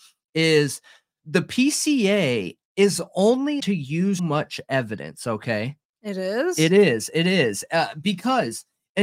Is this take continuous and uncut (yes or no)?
no